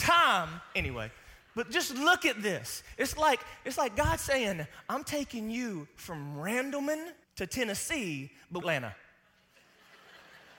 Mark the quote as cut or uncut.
cut